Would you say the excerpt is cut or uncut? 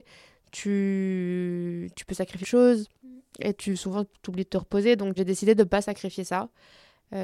cut